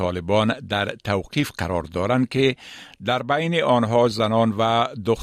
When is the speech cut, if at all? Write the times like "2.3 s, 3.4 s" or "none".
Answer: none